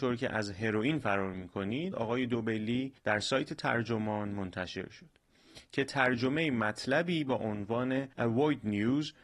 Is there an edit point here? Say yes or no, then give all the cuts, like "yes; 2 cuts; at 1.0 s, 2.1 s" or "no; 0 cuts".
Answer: yes; 3 cuts; at 1.9 s, 3.0 s, 8.1 s